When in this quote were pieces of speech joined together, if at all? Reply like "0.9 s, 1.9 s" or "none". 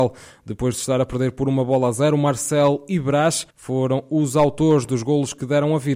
3.5 s